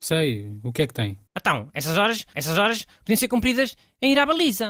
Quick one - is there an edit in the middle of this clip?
yes; 2 cuts; at 1.3 s, 2.3 s

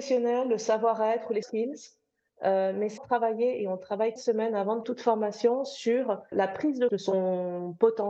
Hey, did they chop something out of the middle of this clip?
yes; 6 cuts; at 1.4 s, 3.0 s, 4.2 s, 4.8 s, 6.3 s, 6.9 s

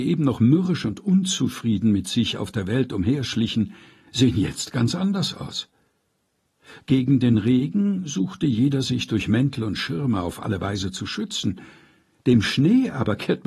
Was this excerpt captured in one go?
yes; 0 cuts

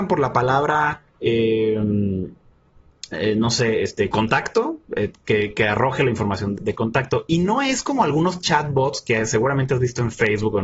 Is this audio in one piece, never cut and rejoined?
no; 1 cut; at 1.1 s

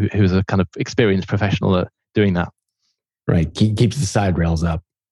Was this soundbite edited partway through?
no; 0 cuts

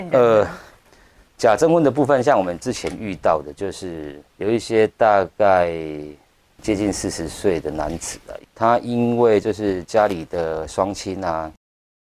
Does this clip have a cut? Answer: yes; 2 cuts; at 4.3 s, 8.5 s

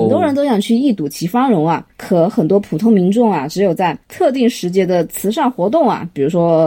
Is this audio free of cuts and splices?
no; 2 cuts; at 1.9 s, 4.0 s

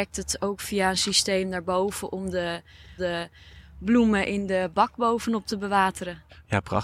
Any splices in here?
yes; 1 cut; at 3.0 s

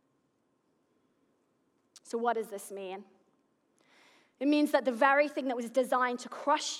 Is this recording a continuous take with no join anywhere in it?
yes; 0 cuts

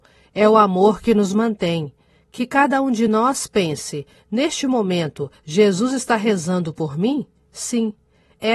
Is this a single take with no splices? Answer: yes; 0 cuts

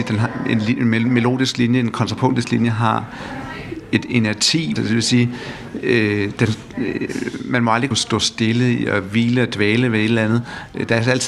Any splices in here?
yes; 2 cuts; at 4.8 s, 7.9 s

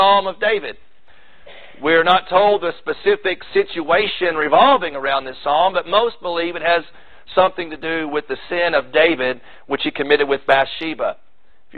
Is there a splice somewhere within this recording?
no; 0 cuts

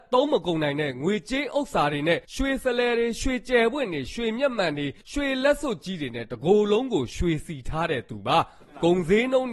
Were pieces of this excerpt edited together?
yes; 2 cuts; at 2.2 s, 5.0 s

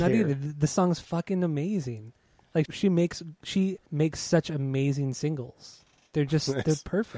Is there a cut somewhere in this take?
yes; 2 cuts; at 2.6 s, 3.9 s

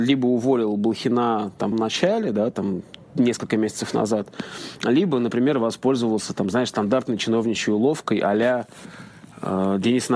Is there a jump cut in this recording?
yes; 1 cut; at 1.7 s

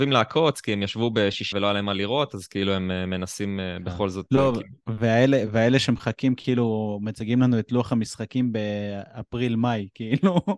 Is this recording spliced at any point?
yes; 2 cuts; at 1.5 s, 4.8 s

